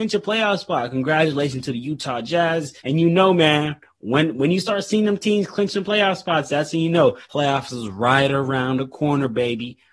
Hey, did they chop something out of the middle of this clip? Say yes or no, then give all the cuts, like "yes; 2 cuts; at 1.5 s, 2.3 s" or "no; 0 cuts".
yes; 2 cuts; at 2.8 s, 7.2 s